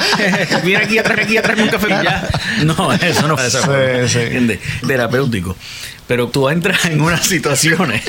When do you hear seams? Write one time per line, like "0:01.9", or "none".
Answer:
0:01.2
0:01.9
0:03.4
0:04.8
0:06.3